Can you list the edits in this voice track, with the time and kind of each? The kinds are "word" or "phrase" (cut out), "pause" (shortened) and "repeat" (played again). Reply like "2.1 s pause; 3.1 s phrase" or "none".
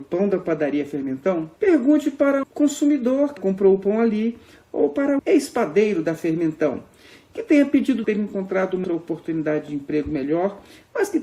1.6 s pause; 2.4 s word; 3.4 s word; 5.2 s word; 8.0 s phrase; 8.8 s word